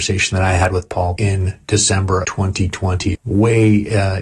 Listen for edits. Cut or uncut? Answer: cut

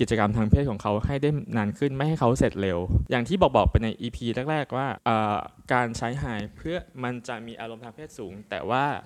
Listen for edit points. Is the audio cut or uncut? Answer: uncut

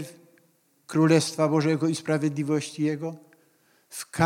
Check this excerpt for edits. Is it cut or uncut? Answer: uncut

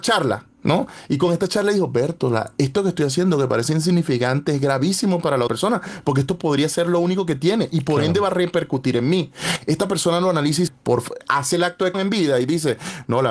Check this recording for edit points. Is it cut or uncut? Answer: cut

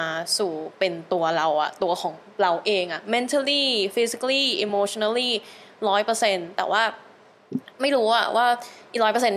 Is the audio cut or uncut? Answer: uncut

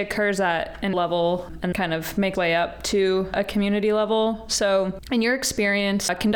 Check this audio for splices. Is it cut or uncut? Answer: cut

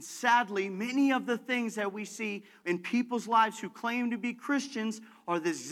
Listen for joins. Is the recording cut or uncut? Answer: uncut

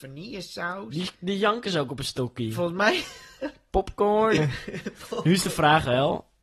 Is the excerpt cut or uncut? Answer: cut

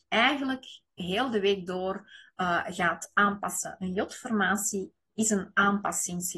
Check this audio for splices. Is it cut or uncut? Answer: uncut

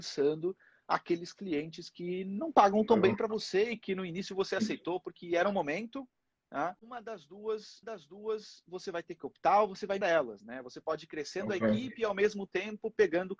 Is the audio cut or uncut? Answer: cut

